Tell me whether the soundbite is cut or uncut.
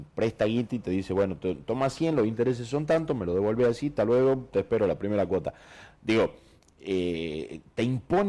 uncut